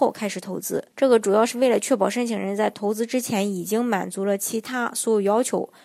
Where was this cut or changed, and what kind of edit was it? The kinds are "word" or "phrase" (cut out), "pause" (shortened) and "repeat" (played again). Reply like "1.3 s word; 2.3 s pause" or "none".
0.9 s pause